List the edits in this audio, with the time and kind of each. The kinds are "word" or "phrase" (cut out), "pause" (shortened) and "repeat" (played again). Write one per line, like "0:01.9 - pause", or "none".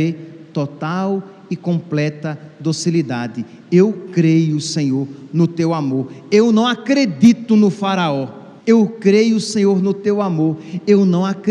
0:08.6 - pause